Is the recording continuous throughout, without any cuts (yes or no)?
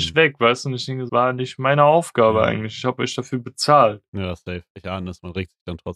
no